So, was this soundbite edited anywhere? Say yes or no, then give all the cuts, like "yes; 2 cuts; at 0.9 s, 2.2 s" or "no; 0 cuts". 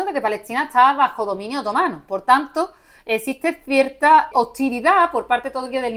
yes; 1 cut; at 4.3 s